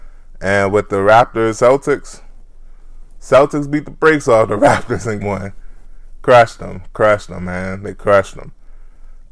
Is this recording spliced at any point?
yes; 2 cuts; at 1.5 s, 5.2 s

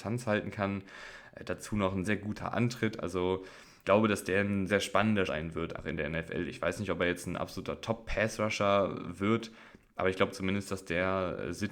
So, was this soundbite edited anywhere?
yes; 5 cuts; at 2.0 s, 3.8 s, 4.7 s, 5.3 s, 5.8 s

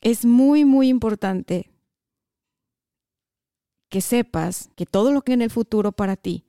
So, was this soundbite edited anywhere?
yes; 2 cuts; at 4.7 s, 5.3 s

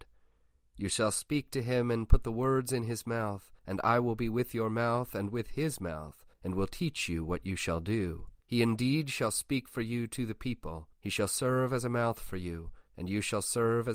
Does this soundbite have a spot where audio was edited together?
yes; 5 cuts; at 3.6 s, 6.3 s, 8.4 s, 10.9 s, 12.9 s

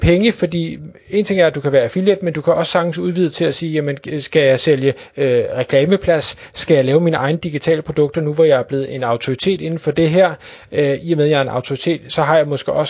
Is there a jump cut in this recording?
no; 0 cuts

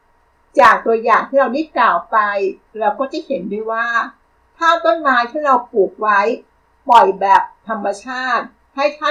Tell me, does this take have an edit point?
no; 0 cuts

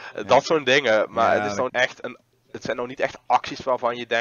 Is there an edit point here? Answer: yes; 2 cuts; at 1.7 s, 2.0 s

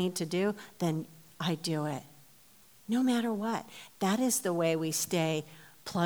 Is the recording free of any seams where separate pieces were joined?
yes; 0 cuts

